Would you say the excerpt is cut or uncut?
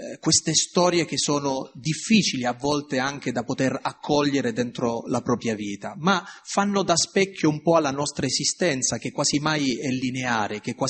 uncut